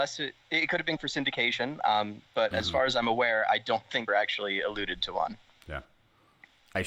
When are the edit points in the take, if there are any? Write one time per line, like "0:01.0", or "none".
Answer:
0:01.0
0:04.1